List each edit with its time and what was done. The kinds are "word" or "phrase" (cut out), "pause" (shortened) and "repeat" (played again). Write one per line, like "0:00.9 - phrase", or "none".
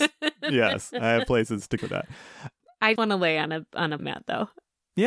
0:01.8 - word
0:03.0 - word
0:04.0 - word